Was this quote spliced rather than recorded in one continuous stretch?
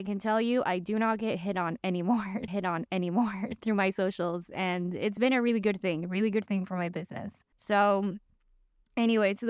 yes; 2 cuts; at 2.5 s, 7.5 s

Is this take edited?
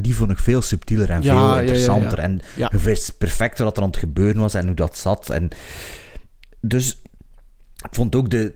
no; 0 cuts

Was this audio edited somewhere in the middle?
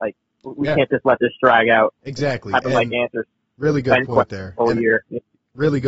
no; 0 cuts

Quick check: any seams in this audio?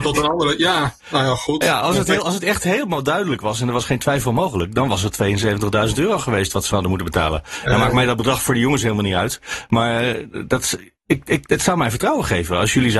no; 0 cuts

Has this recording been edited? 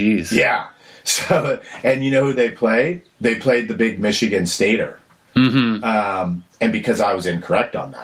no; 0 cuts

